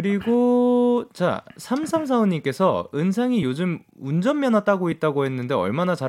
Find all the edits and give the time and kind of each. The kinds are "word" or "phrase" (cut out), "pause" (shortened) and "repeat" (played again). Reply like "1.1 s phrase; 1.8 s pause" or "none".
none